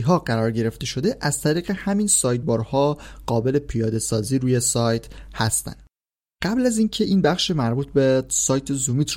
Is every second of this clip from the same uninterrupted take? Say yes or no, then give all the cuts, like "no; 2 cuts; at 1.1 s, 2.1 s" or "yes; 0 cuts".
yes; 0 cuts